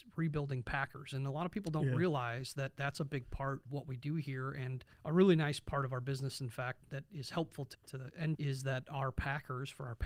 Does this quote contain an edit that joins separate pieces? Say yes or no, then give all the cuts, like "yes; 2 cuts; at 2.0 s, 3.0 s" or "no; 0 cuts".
yes; 5 cuts; at 3.7 s, 4.9 s, 6.8 s, 7.7 s, 8.3 s